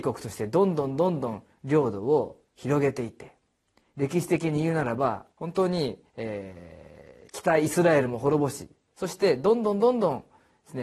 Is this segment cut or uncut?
cut